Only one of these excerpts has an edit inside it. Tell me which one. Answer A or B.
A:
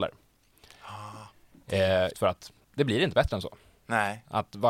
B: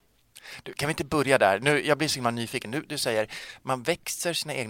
A